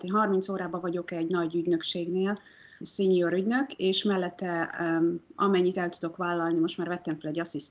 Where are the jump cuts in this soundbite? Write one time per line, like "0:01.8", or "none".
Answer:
0:02.8